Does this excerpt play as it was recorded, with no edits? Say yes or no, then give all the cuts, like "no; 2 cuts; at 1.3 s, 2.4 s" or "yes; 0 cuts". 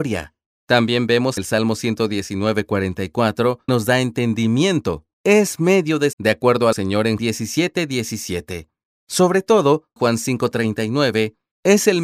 no; 8 cuts; at 1.4 s, 3.7 s, 5.1 s, 6.1 s, 6.7 s, 7.2 s, 8.9 s, 10.0 s